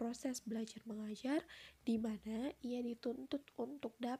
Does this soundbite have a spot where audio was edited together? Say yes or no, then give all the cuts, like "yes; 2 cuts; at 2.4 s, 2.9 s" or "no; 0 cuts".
no; 0 cuts